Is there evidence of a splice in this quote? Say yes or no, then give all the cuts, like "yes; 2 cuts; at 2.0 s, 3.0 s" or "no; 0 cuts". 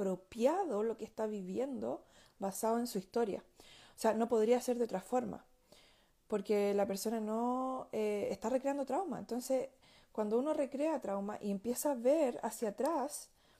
no; 0 cuts